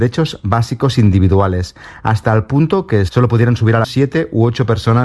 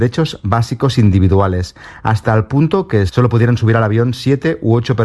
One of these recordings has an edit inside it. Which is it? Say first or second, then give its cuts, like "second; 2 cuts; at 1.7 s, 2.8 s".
first; 1 cut; at 3.8 s